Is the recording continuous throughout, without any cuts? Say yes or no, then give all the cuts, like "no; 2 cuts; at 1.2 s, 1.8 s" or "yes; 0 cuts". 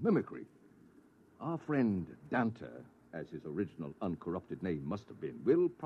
yes; 0 cuts